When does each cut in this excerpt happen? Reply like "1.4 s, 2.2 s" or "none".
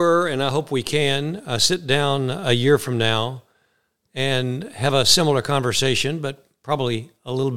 none